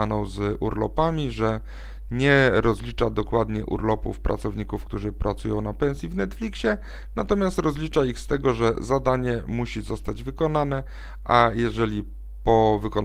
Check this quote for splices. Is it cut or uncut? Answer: uncut